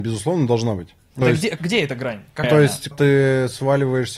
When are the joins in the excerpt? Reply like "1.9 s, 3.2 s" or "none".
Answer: 1.2 s, 1.6 s, 2.4 s, 2.9 s